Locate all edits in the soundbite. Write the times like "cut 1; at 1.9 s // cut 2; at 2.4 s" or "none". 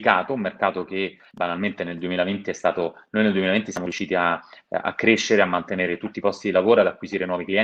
none